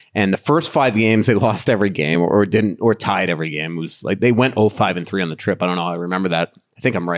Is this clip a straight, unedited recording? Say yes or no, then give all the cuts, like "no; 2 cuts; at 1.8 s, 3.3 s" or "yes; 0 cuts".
yes; 0 cuts